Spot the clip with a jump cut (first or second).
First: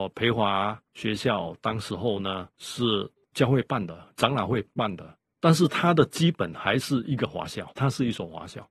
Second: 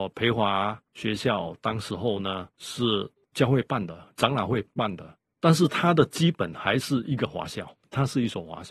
first